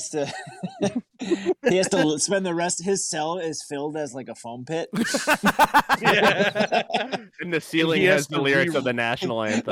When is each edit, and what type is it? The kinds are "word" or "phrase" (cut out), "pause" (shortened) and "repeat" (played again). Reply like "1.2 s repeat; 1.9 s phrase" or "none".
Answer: none